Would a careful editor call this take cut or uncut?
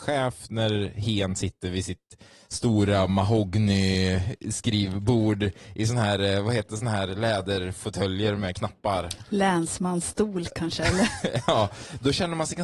uncut